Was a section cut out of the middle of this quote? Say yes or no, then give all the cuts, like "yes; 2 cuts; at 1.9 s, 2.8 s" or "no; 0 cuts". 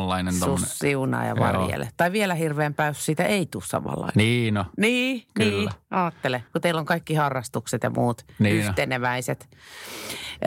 yes; 1 cut; at 6.5 s